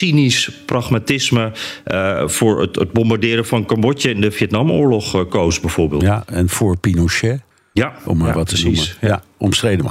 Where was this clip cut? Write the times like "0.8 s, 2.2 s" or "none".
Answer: 7.5 s